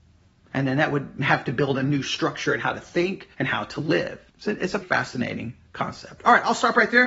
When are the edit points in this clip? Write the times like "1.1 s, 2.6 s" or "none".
1.8 s, 3.3 s, 4.3 s, 4.8 s